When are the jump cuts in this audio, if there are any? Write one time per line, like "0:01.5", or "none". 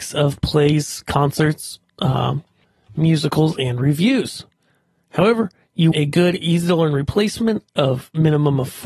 0:02.6
0:05.9

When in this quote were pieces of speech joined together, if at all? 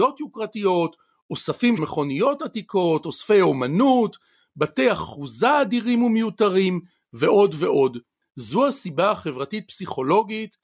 0:01.8

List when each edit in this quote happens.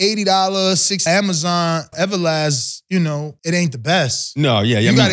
0:01.1
0:01.9
0:03.4

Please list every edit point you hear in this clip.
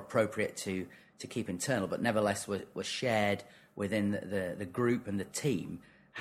none

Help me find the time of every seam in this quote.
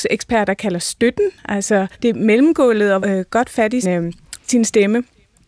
0:01.9
0:03.0
0:03.8

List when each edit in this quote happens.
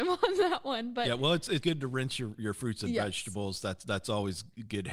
0:01.6

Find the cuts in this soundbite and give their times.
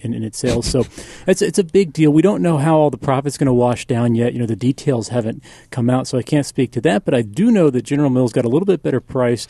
none

